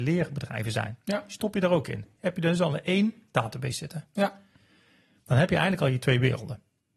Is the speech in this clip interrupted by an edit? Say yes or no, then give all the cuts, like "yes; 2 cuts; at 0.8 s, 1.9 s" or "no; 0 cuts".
no; 0 cuts